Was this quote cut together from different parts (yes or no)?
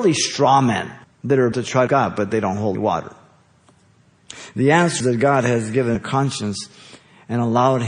yes